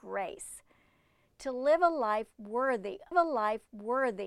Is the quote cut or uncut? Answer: cut